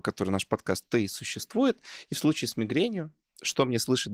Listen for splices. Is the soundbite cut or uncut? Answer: uncut